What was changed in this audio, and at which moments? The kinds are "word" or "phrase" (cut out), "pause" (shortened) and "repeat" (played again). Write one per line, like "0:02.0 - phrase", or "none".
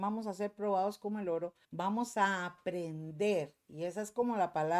0:01.6 - pause